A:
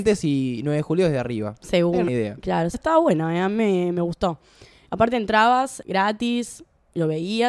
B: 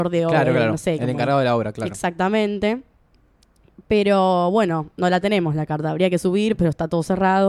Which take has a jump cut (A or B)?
A